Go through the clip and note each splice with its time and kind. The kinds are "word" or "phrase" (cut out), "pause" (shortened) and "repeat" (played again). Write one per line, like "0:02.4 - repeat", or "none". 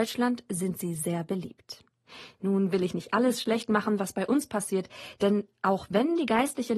none